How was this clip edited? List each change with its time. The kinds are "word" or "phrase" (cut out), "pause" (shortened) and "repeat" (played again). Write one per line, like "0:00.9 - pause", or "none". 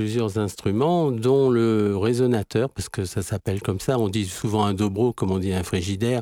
none